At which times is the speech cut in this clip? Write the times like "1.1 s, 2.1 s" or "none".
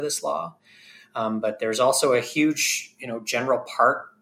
none